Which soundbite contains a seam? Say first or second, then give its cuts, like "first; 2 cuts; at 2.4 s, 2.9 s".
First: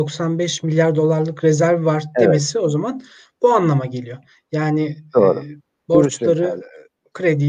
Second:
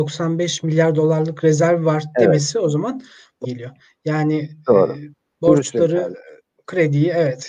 second; 1 cut; at 3.4 s